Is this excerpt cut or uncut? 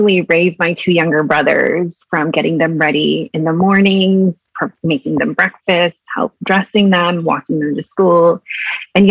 uncut